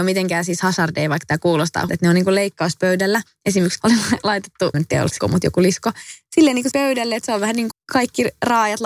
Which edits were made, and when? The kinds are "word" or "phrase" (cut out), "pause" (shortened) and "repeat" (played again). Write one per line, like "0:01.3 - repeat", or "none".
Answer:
0:01.9 - word
0:03.8 - word
0:04.7 - word
0:05.2 - word
0:06.7 - word
0:07.7 - word